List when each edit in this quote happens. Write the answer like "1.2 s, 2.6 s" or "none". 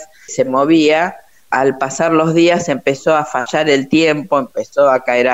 none